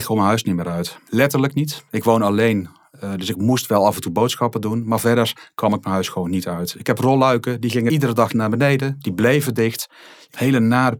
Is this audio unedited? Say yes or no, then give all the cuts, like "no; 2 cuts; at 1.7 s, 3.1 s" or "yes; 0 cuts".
yes; 0 cuts